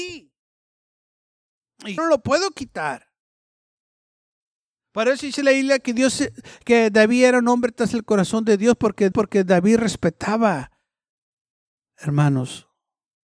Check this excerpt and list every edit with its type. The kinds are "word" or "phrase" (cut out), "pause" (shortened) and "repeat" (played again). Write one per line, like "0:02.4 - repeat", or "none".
0:02.0 - word
0:09.1 - repeat